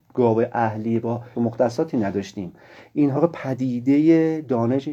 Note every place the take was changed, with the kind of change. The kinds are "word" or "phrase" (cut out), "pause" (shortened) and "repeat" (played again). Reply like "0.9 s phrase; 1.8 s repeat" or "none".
1.3 s phrase; 3.1 s word